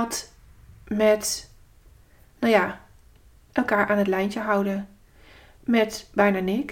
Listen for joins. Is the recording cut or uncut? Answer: uncut